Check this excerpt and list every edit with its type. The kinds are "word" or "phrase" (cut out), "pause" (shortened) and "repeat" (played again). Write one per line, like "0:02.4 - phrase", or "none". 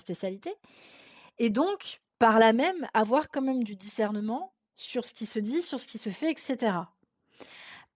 none

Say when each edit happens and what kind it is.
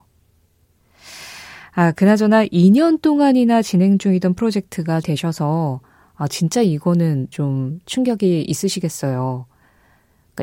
0:05.0 - word
0:07.3 - word

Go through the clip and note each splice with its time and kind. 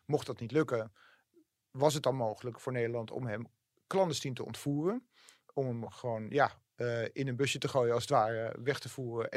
none

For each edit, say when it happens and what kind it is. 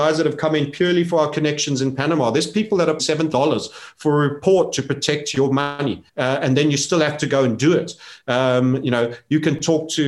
0:03.0 - phrase
0:03.3 - word
0:06.1 - pause

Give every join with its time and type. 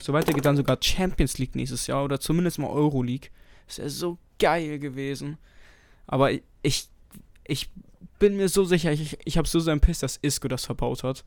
none

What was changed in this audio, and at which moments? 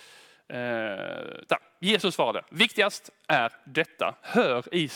none

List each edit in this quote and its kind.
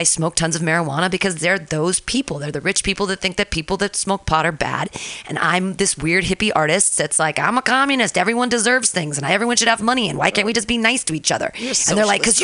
none

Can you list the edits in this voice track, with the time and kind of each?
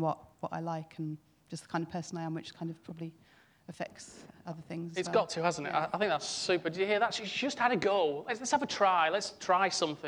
none

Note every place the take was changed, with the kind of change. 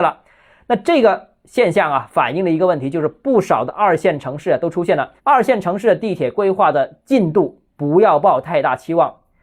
0:05.2 - pause

